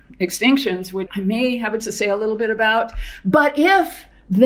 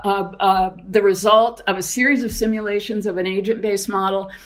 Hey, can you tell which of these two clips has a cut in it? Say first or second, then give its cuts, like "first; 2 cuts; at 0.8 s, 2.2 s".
first; 2 cuts; at 1.1 s, 1.8 s